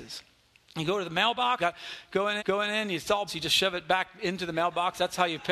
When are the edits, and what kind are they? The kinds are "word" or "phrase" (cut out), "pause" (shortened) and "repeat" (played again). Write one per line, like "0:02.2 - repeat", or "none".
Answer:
0:01.6 - word
0:02.4 - repeat
0:03.3 - word

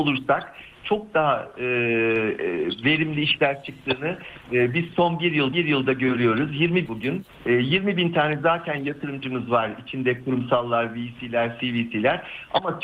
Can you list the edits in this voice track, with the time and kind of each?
0:05.5 - repeat
0:06.8 - phrase
0:07.3 - pause

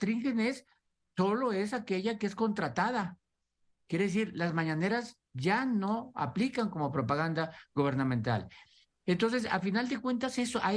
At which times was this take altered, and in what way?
none

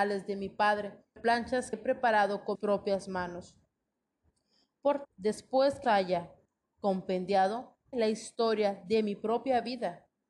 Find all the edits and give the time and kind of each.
0:01.2 - word
0:01.7 - word
0:02.5 - word
0:05.0 - word
0:05.8 - word
0:07.9 - word

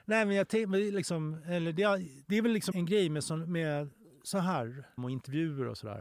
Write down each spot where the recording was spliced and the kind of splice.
0:02.2 - pause
0:02.7 - word
0:04.0 - pause
0:05.0 - word

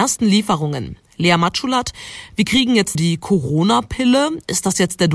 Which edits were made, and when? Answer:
0:02.9 - word

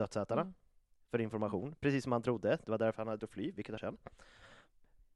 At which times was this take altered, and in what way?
0:03.2 - word
0:03.8 - word

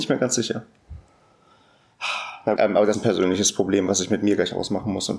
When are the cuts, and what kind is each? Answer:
0:02.6 - word
0:02.9 - word

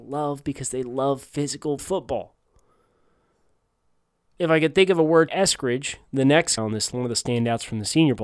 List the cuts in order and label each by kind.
0:01.8 - word
0:05.3 - phrase
0:06.6 - word
0:06.9 - word

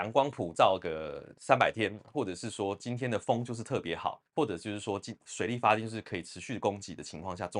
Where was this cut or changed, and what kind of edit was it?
0:04.3 - pause

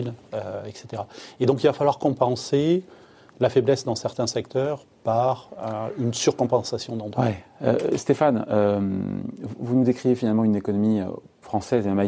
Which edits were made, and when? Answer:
none

